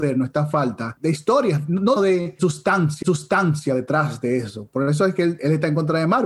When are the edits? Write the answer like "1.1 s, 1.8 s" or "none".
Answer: 2.0 s, 3.0 s